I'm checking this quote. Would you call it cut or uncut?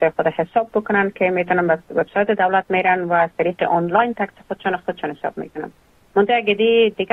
uncut